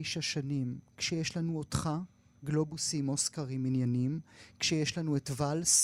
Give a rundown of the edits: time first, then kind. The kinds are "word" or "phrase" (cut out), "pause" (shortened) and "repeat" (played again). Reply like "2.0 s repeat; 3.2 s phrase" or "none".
none